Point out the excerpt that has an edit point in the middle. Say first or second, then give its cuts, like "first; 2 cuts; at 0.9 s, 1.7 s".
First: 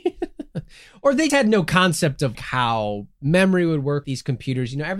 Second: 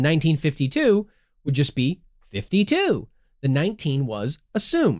first; 3 cuts; at 1.3 s, 2.3 s, 4.0 s